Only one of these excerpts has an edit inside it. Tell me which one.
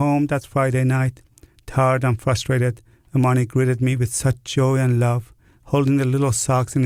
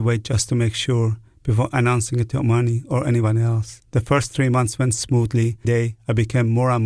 second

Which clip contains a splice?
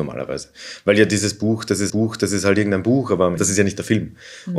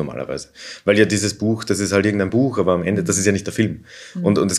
first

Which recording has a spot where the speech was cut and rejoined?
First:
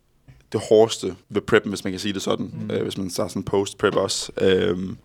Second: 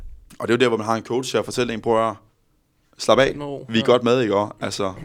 first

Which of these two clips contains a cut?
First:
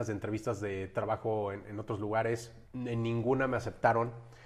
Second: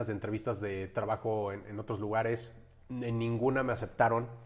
first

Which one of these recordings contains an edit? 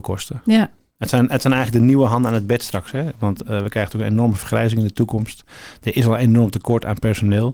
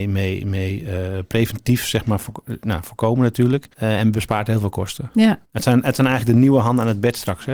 second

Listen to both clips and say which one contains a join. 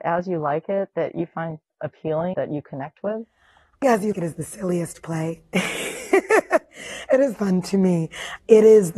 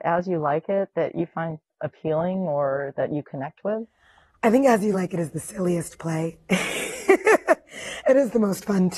first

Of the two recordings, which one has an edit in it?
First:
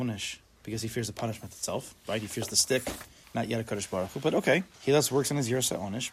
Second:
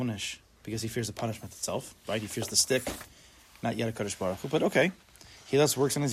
first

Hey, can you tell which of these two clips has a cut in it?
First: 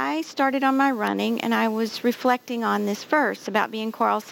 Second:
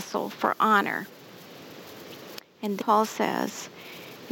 second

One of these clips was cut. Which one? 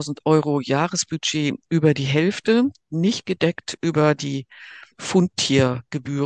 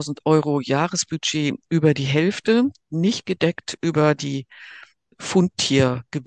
first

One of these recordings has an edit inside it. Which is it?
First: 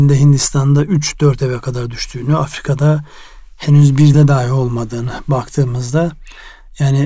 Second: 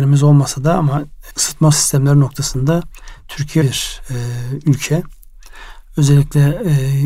second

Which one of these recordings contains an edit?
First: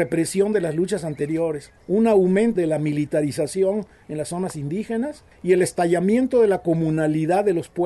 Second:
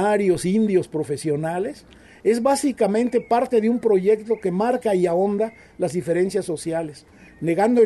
first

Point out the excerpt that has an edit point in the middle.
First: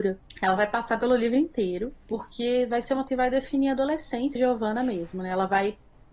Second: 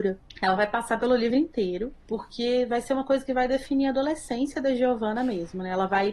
first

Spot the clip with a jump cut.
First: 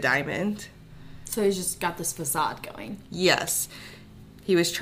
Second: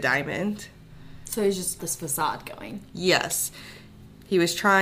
second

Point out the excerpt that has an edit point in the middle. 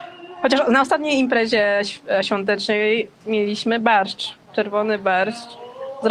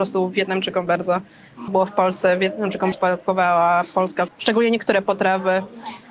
second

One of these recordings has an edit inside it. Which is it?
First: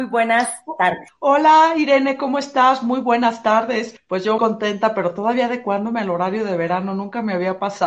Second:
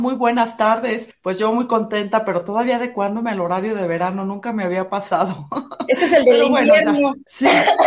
first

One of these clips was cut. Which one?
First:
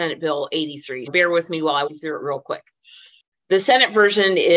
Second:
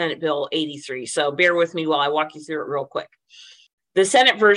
first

